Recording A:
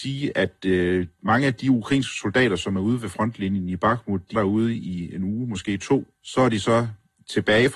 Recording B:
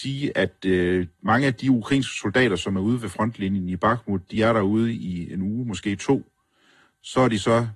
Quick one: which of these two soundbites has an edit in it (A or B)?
A